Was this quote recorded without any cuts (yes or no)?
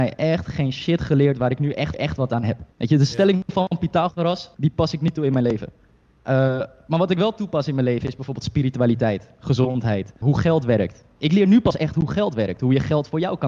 no